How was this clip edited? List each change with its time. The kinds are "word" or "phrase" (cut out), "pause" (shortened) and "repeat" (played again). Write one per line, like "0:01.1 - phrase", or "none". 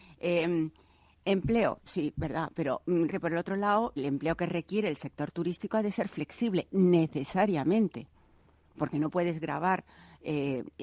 0:03.1 - word
0:04.0 - word

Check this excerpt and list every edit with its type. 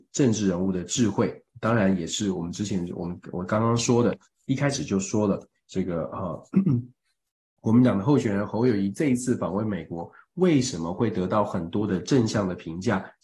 none

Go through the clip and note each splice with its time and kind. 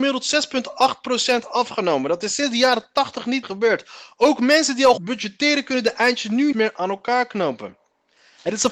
0:03.4 - word
0:05.0 - word
0:06.5 - word

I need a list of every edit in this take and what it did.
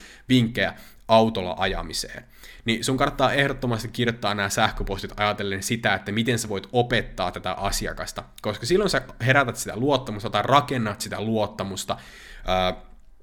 none

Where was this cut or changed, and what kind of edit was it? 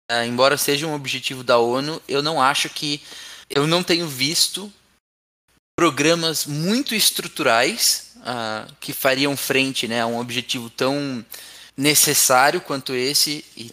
0:03.4 - pause
0:11.7 - pause

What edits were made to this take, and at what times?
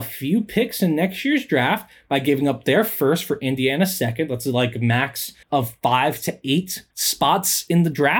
0:05.4 - pause
0:06.9 - pause

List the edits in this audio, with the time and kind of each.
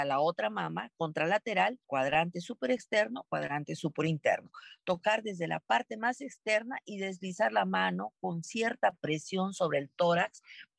0:01.8 - pause

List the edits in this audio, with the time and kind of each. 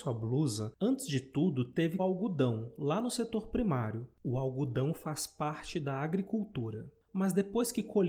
0:02.0 - phrase

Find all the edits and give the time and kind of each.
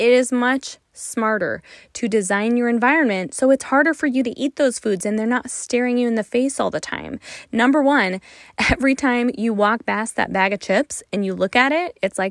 none

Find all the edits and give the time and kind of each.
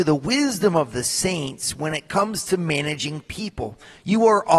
none

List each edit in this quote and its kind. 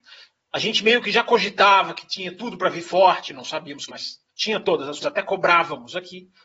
0:03.9 - word
0:04.3 - pause
0:05.0 - word

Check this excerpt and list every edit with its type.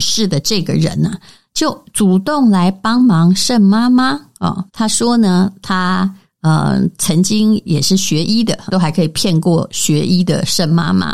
0:04.7 - pause
0:08.7 - word

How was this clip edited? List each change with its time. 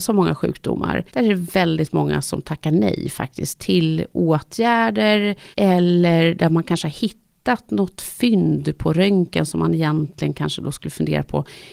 0:01.1 - pause
0:05.5 - pause

